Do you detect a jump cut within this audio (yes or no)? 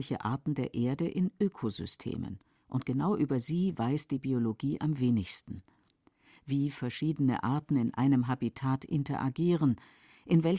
no